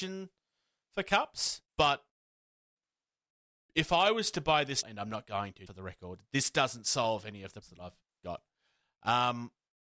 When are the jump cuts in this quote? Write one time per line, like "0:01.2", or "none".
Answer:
0:01.7
0:04.8
0:05.7
0:07.6
0:08.0